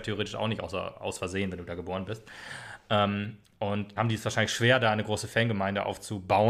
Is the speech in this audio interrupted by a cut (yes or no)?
yes